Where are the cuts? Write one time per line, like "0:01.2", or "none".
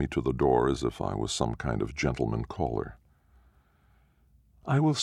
none